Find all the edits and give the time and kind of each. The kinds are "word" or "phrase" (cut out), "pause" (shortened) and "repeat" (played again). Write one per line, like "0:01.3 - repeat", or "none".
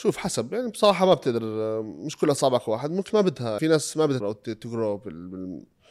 0:03.1 - phrase
0:03.6 - word
0:04.2 - word